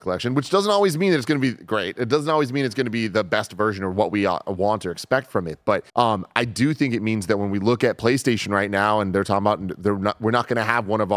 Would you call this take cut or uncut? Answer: cut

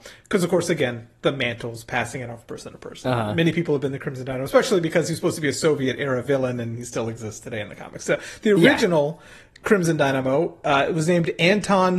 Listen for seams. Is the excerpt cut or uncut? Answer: uncut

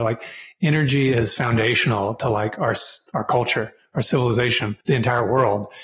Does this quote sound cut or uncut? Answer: cut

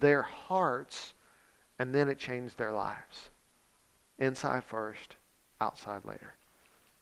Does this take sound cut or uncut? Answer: uncut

